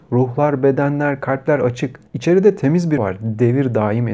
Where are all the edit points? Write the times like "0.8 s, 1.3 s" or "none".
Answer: 2.1 s, 3.0 s